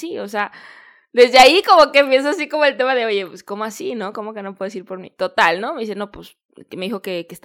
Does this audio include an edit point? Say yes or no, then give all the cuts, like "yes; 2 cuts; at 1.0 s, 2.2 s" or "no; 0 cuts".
no; 0 cuts